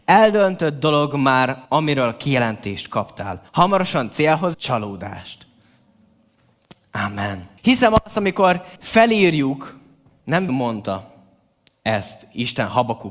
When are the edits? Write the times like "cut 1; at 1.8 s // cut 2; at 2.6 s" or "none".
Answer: cut 1; at 1.6 s // cut 2; at 3.5 s // cut 3; at 4.5 s // cut 4; at 7.6 s // cut 5; at 8.8 s // cut 6; at 10.5 s